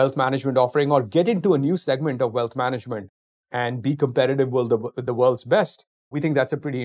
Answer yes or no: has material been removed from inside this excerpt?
no